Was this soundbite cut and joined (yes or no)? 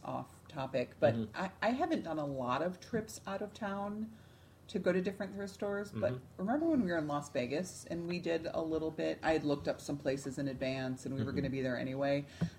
no